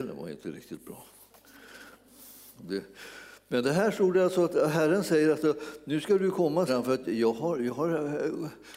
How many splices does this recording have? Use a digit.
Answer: 1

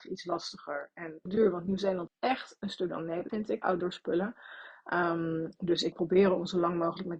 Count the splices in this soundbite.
6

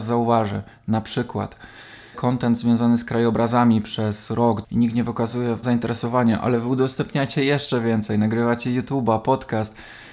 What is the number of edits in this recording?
3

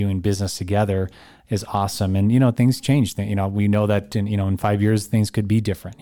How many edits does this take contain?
0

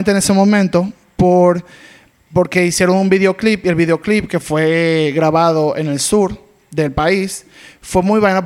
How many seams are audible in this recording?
0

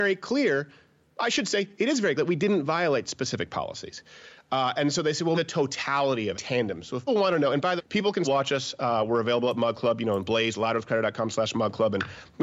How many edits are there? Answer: 6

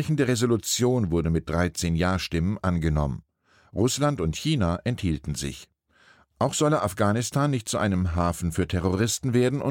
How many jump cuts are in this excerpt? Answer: 0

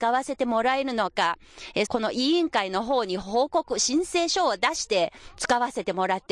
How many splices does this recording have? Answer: 1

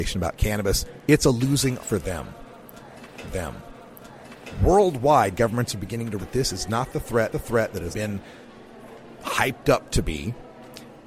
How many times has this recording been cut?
5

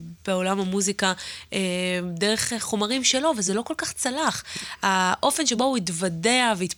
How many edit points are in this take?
0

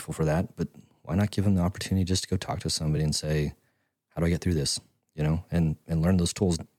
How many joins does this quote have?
0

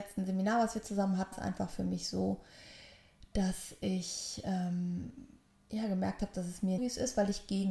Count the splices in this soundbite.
3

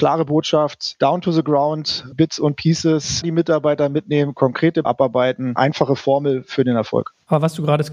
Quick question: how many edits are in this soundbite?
3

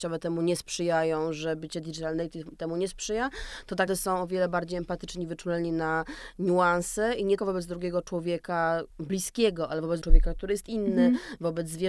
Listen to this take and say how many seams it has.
4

